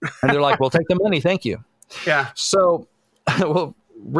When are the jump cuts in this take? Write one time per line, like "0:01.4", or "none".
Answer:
none